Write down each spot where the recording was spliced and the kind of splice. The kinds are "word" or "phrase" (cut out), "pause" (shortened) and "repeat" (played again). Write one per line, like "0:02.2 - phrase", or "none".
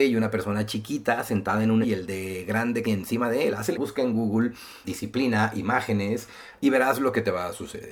0:01.8 - word
0:02.8 - word
0:03.7 - word
0:04.8 - word